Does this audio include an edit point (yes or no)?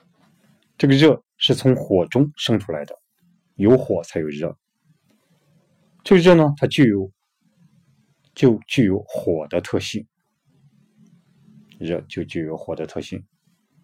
no